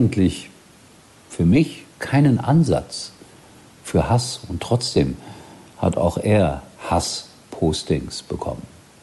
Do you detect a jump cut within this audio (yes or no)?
yes